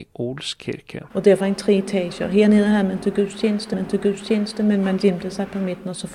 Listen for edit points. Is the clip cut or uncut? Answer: cut